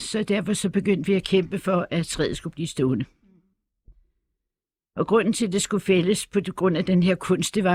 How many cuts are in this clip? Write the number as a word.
zero